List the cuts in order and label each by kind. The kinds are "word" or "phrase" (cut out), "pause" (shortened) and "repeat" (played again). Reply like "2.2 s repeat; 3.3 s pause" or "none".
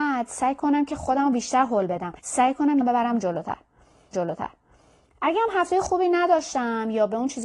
2.2 s pause; 2.8 s phrase; 4.1 s repeat